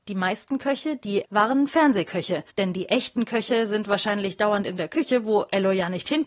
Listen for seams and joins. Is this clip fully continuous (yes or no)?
no